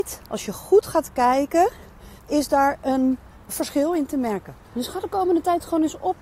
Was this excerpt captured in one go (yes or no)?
no